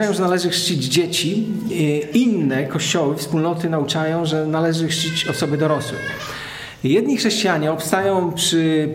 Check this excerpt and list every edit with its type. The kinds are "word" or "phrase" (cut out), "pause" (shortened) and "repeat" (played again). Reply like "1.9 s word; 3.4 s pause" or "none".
none